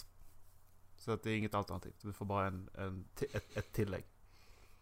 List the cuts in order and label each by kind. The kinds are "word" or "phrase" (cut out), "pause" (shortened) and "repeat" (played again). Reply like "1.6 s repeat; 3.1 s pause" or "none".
3.5 s repeat